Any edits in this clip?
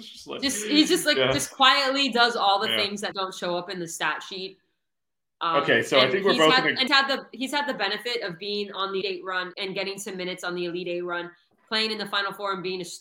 yes; 4 cuts; at 3.1 s, 6.9 s, 9.0 s, 9.5 s

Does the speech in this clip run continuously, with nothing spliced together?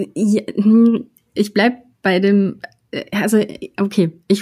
yes; 0 cuts

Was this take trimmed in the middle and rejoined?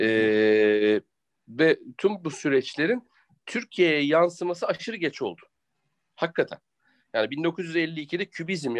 no; 0 cuts

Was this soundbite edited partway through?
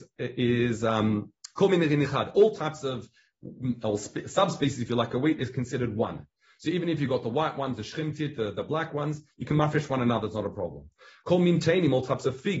no; 0 cuts

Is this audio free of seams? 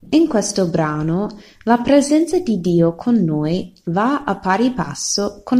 yes; 0 cuts

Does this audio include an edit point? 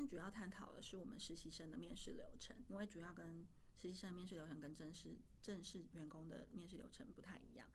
yes; 1 cut; at 2.7 s

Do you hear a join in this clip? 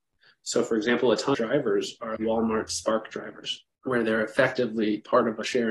yes; 2 cuts; at 1.3 s, 2.2 s

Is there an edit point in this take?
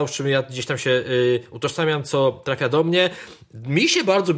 no; 0 cuts

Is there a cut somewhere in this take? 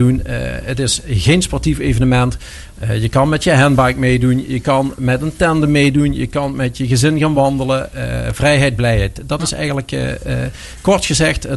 no; 0 cuts

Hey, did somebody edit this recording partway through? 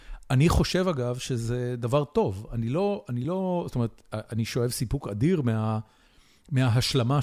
no; 0 cuts

